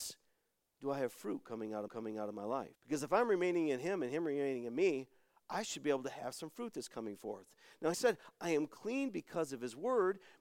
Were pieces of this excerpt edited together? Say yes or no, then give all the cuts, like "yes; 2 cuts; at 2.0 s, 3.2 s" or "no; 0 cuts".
yes; 3 cuts; at 1.9 s, 2.7 s, 7.9 s